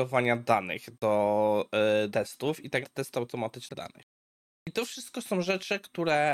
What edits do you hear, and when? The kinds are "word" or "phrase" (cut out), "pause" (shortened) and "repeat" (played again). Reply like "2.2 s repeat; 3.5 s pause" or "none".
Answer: 2.1 s word; 2.8 s word; 3.7 s phrase